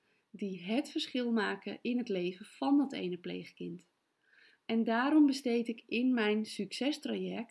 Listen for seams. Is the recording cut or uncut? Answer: uncut